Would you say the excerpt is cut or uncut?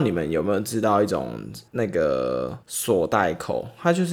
cut